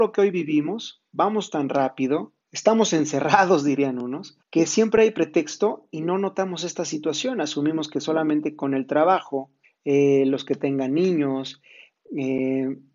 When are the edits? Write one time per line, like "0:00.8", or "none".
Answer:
0:02.4
0:04.4
0:09.6